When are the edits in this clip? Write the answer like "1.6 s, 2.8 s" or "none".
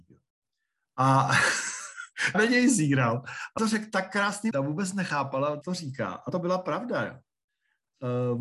2.3 s, 3.6 s, 4.5 s, 5.6 s, 6.3 s